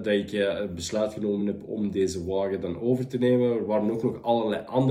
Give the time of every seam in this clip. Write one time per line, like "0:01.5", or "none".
none